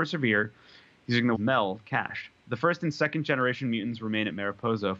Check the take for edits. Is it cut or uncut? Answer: cut